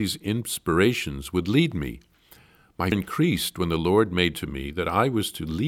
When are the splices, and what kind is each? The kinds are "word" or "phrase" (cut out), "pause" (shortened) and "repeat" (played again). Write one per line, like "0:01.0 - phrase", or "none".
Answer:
0:02.9 - word
0:04.3 - word